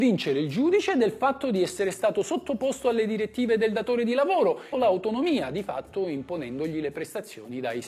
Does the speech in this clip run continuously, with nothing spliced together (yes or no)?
no